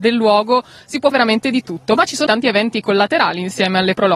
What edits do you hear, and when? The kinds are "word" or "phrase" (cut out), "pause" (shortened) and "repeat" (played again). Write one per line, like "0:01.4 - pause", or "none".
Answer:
0:01.1 - word
0:02.3 - word